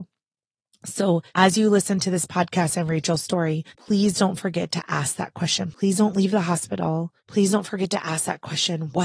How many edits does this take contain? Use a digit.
3